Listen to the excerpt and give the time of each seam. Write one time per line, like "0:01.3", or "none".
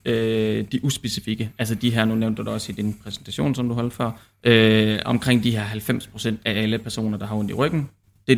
0:06.4